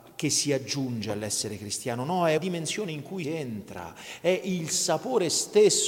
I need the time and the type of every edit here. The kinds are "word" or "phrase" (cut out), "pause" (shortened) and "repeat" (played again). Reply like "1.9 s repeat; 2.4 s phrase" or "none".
2.4 s word; 3.2 s word